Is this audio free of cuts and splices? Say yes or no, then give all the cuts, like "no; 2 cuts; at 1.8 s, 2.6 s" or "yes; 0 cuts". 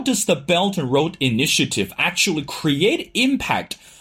yes; 0 cuts